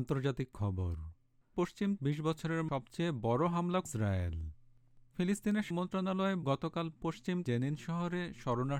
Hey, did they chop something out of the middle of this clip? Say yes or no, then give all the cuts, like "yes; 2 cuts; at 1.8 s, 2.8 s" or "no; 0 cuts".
yes; 7 cuts; at 1.5 s, 2.0 s, 2.7 s, 3.9 s, 5.7 s, 6.4 s, 7.4 s